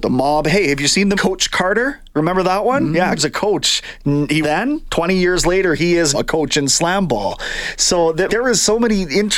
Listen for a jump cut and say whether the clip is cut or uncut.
cut